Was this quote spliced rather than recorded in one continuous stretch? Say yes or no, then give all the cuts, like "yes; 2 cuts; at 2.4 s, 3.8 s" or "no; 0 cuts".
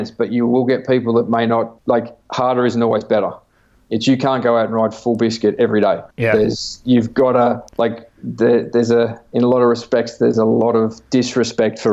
yes; 4 cuts; at 1.8 s, 3.7 s, 6.1 s, 7.7 s